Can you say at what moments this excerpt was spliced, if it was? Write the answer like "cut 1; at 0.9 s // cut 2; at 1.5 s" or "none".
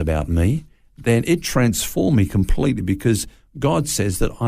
none

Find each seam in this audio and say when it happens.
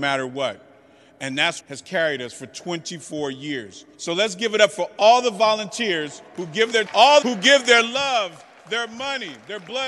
cut 1; at 1.6 s // cut 2; at 3.9 s // cut 3; at 6.9 s // cut 4; at 7.2 s

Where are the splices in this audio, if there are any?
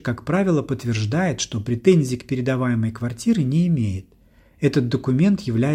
none

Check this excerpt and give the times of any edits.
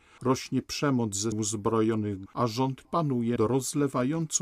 cut 1; at 1.3 s // cut 2; at 2.3 s // cut 3; at 2.8 s // cut 4; at 3.4 s

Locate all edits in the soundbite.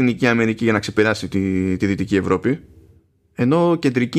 none

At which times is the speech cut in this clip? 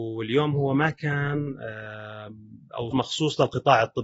cut 1; at 2.9 s

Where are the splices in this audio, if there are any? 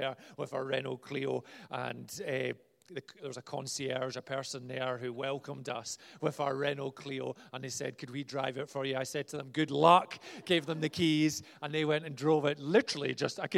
none

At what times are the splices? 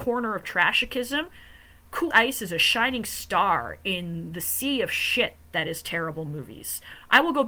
cut 1; at 2.1 s

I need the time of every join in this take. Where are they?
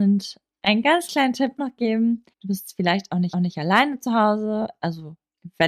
cut 1; at 1.6 s // cut 2; at 2.3 s // cut 3; at 3.3 s

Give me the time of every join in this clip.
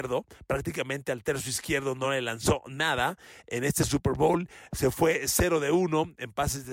none

